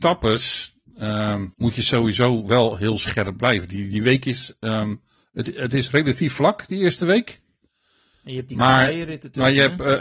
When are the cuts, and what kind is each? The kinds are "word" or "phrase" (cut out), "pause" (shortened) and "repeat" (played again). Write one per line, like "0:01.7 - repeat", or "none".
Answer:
0:01.5 - pause
0:05.2 - pause